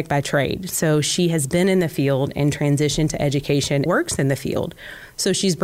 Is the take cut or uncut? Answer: cut